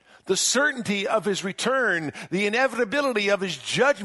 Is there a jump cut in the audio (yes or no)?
no